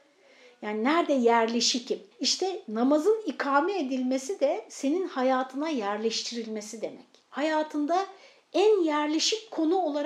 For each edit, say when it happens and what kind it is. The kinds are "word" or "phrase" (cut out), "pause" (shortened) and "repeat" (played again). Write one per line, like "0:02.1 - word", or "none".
0:02.1 - pause
0:07.2 - pause